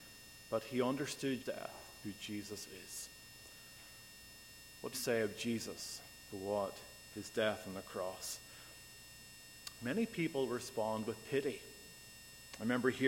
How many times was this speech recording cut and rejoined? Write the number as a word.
four